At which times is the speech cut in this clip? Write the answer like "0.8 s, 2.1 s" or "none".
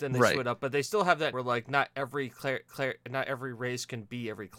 1.3 s, 2.7 s